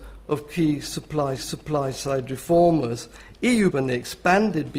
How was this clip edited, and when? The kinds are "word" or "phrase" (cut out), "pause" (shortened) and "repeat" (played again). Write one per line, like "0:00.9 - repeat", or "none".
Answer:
0:01.4 - repeat
0:03.7 - word